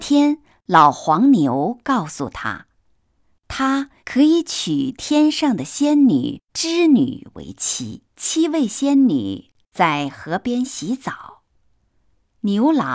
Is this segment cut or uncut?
cut